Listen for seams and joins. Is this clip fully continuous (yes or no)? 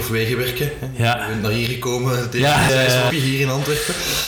no